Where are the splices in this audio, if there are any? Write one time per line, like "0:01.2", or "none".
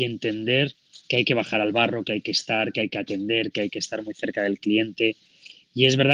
none